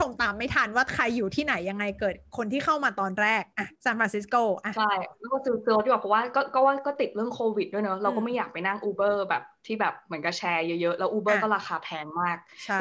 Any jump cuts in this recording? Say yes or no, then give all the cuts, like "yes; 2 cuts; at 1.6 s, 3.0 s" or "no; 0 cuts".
yes; 1 cut; at 3.8 s